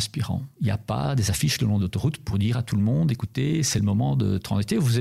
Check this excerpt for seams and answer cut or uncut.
uncut